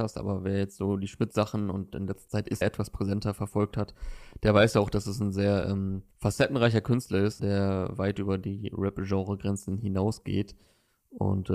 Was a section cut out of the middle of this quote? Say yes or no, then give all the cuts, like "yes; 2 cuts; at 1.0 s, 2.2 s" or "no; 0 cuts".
yes; 3 cuts; at 2.6 s, 6.1 s, 7.4 s